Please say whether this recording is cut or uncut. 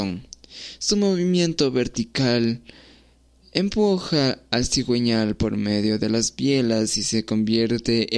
uncut